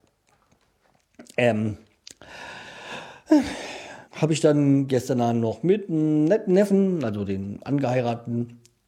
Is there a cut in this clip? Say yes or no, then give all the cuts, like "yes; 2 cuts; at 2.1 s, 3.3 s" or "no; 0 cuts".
yes; 1 cut; at 4.0 s